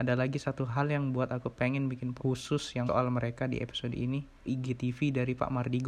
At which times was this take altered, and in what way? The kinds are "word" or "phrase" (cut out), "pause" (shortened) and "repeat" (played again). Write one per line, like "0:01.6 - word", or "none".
0:02.2 - word
0:02.9 - word
0:04.5 - phrase